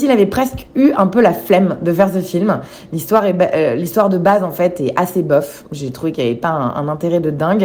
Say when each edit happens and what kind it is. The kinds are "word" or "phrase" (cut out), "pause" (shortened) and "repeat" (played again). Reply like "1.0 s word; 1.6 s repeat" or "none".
none